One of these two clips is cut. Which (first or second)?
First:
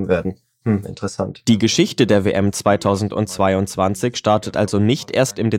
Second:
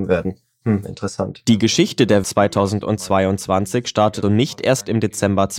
second